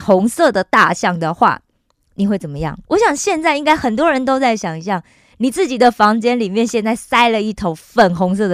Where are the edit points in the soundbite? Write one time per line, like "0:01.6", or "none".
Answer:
0:02.8